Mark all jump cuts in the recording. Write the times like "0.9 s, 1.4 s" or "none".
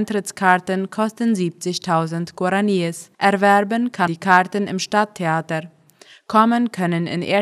3.1 s, 4.1 s

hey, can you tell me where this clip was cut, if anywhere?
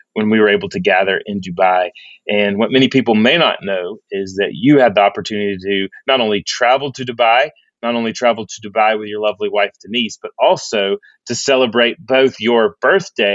none

